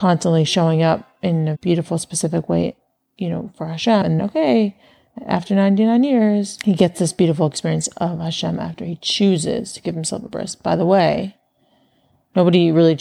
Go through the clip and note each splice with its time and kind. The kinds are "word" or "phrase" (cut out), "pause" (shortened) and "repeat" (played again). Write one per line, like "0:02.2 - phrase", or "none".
0:01.5 - word
0:04.2 - word